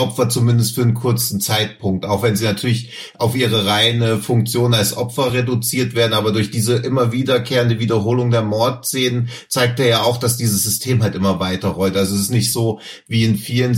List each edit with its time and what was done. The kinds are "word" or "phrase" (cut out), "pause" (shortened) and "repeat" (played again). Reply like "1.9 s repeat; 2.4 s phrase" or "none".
none